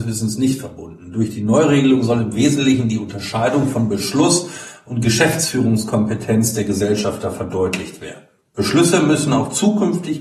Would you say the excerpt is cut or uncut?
uncut